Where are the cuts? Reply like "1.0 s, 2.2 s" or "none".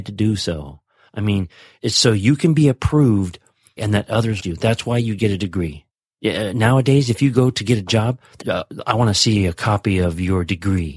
1.8 s, 3.8 s, 4.4 s, 5.9 s, 8.4 s